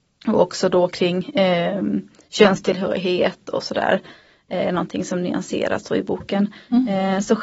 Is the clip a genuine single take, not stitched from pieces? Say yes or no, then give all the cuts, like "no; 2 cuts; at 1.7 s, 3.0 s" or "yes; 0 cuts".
yes; 0 cuts